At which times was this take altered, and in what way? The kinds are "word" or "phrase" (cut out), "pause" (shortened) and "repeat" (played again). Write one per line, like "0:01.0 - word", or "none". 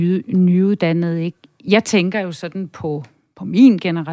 none